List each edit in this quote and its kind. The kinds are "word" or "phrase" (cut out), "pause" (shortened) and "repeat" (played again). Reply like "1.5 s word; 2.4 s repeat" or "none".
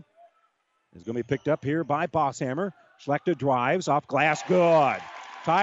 none